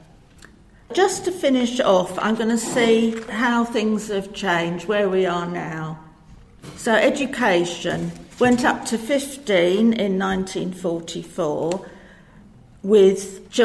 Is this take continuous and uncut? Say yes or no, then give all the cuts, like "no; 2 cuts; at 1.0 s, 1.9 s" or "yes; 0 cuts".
yes; 0 cuts